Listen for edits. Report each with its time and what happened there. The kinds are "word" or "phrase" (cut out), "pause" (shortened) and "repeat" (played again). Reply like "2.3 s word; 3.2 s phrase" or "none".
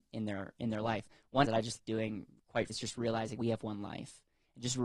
1.4 s word; 1.8 s word; 2.7 s word; 3.3 s word